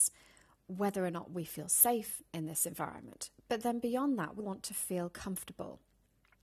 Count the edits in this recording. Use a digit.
1